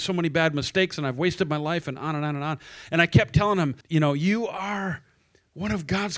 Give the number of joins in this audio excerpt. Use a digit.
1